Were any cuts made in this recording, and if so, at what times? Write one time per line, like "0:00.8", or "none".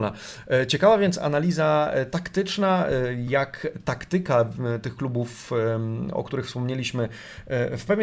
none